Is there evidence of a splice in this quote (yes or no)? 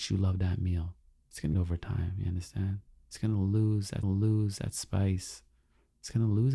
yes